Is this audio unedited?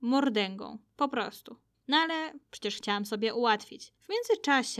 yes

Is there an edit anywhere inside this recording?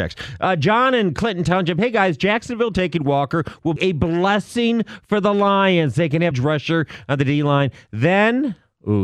yes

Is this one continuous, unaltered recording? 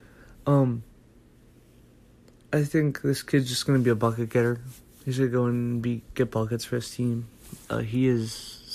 yes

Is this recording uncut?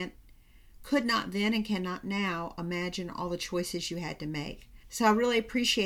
no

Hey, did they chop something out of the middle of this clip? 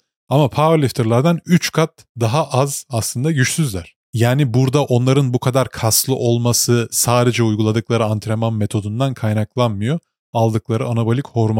no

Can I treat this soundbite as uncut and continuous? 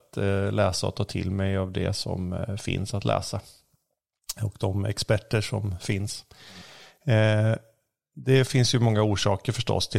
yes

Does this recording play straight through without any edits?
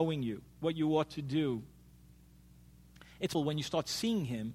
no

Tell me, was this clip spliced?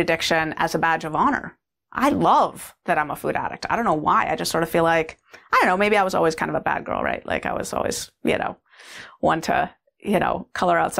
no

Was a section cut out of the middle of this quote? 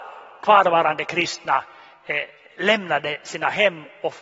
no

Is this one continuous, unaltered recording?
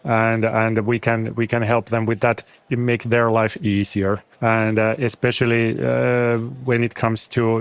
no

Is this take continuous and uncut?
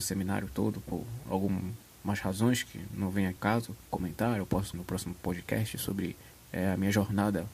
no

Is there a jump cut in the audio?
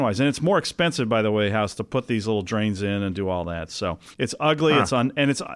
yes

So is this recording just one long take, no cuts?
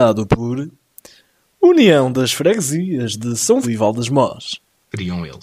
no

